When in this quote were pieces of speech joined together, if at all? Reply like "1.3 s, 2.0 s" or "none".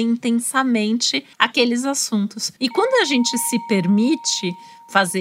1.3 s, 2.6 s